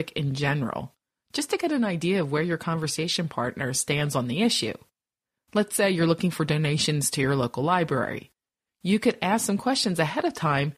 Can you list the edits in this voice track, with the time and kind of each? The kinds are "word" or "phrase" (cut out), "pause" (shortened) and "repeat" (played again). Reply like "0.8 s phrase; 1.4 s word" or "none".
none